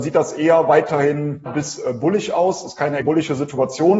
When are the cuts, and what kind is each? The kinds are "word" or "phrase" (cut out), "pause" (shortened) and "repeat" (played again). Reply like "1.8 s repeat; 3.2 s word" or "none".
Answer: 1.5 s word; 3.0 s word